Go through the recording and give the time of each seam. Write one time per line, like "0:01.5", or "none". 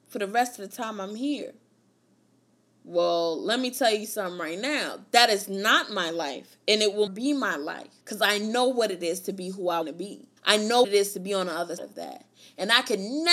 0:02.0
0:07.1
0:08.0
0:09.8
0:10.4
0:10.8
0:11.8